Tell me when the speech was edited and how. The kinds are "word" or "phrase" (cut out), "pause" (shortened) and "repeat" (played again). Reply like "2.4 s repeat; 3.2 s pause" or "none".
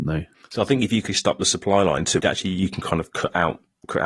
1.1 s word; 2.2 s phrase